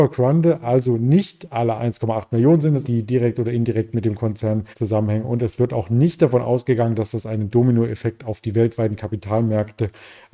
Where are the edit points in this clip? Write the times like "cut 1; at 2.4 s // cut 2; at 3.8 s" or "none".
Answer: cut 1; at 1.8 s // cut 2; at 2.8 s // cut 3; at 4.7 s